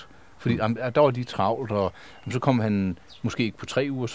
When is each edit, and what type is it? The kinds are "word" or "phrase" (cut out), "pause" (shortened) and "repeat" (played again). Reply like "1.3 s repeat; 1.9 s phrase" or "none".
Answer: none

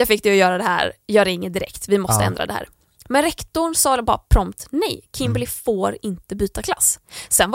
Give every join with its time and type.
none

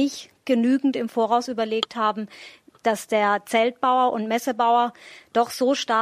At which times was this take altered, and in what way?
none

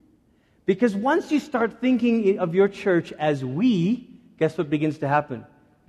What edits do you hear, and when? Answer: none

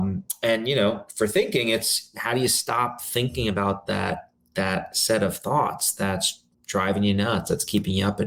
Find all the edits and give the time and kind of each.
6.5 s pause

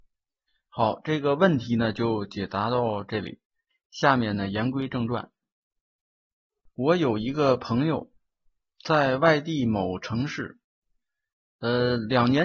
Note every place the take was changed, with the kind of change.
none

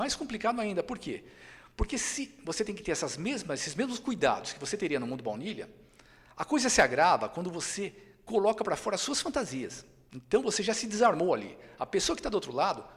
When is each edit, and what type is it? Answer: 10.1 s pause

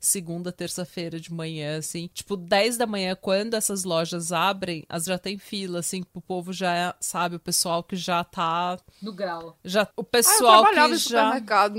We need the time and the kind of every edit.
2.1 s pause; 5.1 s word; 9.9 s pause

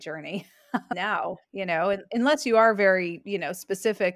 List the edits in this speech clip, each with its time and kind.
1.4 s pause

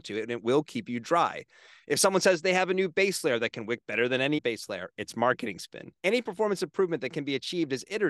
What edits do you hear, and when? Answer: 4.4 s word; 6.0 s pause

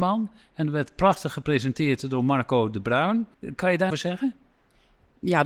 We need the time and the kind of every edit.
3.3 s pause; 3.9 s phrase

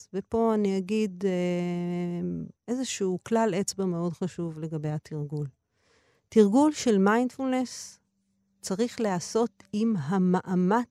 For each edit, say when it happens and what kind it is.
2.6 s pause

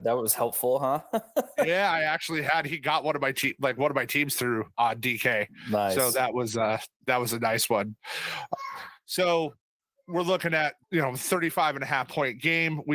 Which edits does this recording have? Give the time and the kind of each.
4.7 s word; 10.8 s pause

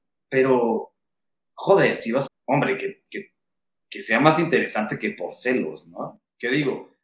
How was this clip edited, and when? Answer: 2.3 s phrase

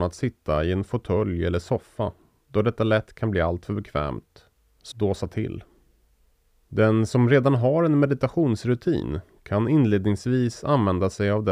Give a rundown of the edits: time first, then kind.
4.9 s phrase

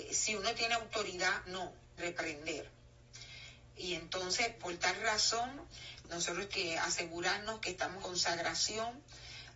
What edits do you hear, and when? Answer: 1.5 s word; 2.0 s word; 4.6 s word; 6.5 s word; 8.0 s word

